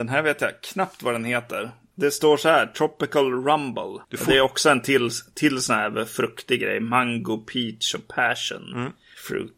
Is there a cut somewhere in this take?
yes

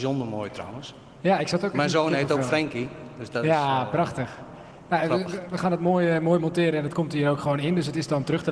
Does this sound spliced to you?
no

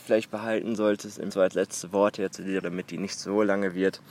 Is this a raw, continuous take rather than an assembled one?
no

